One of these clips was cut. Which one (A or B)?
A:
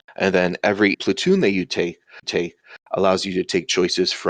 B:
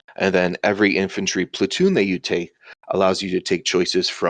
A